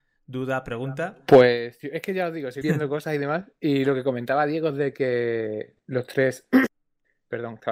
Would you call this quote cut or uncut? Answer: cut